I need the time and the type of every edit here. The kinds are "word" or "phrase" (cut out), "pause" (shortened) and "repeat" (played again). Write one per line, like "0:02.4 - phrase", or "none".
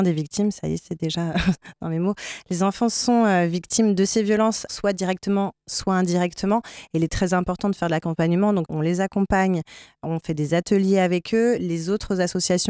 0:04.7 - word
0:08.7 - word